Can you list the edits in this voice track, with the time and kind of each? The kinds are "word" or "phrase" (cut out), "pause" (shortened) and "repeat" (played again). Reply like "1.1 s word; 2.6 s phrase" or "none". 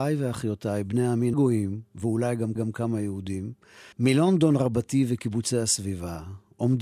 1.3 s phrase; 2.6 s repeat; 3.9 s pause